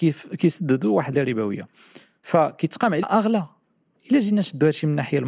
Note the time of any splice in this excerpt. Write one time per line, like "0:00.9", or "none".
0:01.1
0:03.0
0:04.0